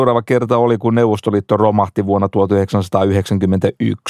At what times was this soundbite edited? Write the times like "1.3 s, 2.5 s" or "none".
none